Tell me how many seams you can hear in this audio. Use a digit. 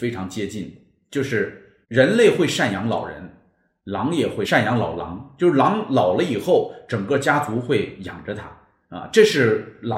1